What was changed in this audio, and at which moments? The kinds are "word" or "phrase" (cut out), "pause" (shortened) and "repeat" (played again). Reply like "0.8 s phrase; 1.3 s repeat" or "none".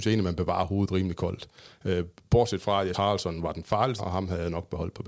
2.9 s word; 4.0 s word